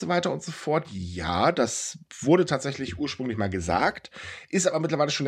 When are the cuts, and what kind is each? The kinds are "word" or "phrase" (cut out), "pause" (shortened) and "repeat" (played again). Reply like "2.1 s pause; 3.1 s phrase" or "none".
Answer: none